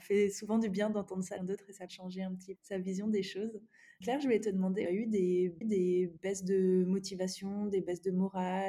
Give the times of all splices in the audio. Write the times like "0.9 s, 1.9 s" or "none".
1.4 s, 1.9 s, 2.6 s, 4.0 s, 4.9 s, 5.6 s

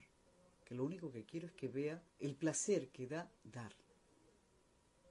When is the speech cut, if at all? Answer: 2.1 s, 3.4 s

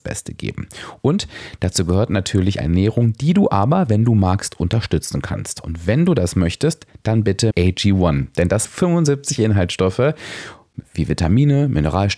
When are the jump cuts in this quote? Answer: 2.6 s, 7.5 s, 8.6 s

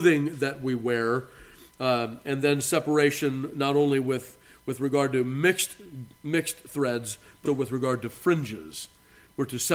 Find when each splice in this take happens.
6.2 s, 7.5 s

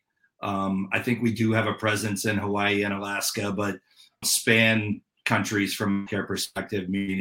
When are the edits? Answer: 4.2 s

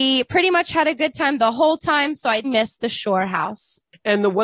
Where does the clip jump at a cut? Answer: 2.4 s

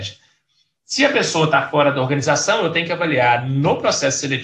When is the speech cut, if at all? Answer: none

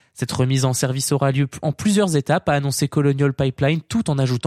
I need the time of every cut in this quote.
none

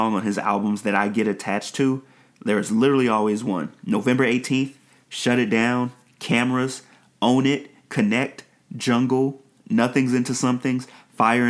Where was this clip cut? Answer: none

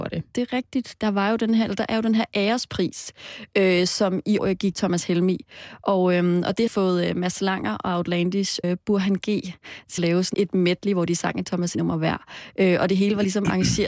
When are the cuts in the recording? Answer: 4.4 s, 4.8 s, 6.7 s, 8.6 s, 10.0 s, 10.3 s, 11.7 s

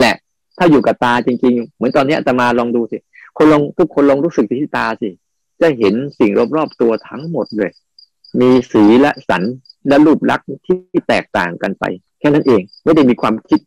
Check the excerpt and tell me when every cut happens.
12.1 s

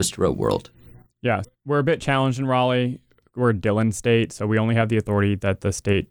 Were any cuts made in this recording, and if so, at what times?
1.4 s

